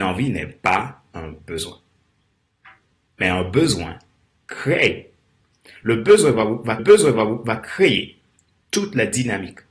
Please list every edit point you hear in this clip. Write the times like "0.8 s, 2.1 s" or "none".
6.8 s